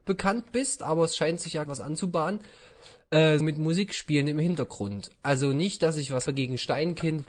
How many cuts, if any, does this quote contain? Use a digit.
3